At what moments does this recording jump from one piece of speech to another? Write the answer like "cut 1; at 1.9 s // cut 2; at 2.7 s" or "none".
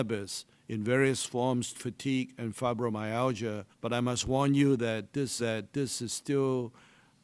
cut 1; at 1.7 s // cut 2; at 3.7 s // cut 3; at 5.4 s